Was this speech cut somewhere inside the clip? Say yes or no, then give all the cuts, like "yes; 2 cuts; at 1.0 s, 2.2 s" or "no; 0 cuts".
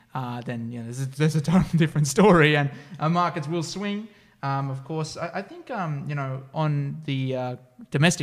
no; 0 cuts